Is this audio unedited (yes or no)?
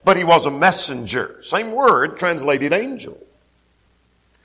yes